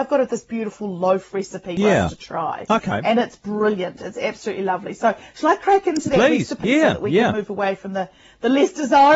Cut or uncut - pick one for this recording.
uncut